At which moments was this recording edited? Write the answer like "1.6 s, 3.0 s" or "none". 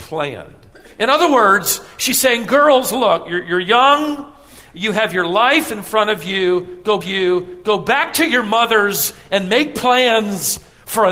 7.0 s

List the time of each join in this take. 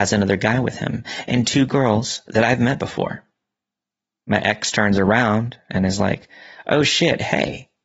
none

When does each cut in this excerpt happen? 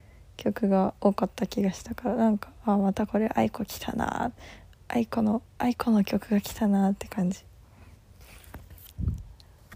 1.0 s

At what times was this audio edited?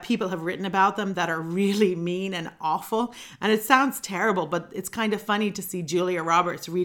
none

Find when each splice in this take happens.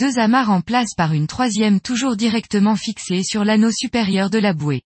none

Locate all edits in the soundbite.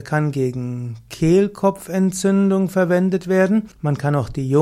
3.7 s

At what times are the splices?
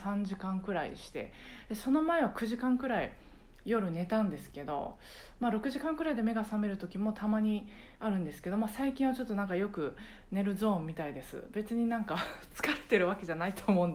none

